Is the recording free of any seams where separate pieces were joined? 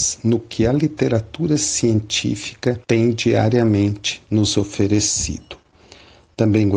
no; 1 cut; at 2.8 s

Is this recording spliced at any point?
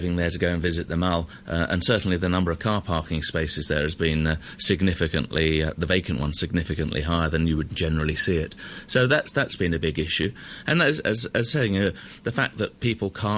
no; 0 cuts

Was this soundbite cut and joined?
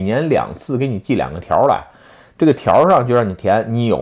no; 0 cuts

